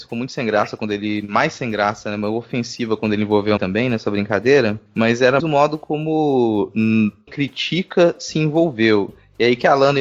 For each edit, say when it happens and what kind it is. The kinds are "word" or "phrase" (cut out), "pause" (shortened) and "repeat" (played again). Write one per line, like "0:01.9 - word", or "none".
0:03.6 - word
0:05.4 - word
0:07.3 - word